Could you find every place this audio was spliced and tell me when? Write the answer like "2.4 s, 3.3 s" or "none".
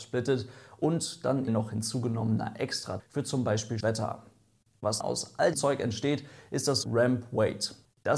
1.5 s, 3.0 s, 3.8 s, 5.0 s, 5.5 s, 6.8 s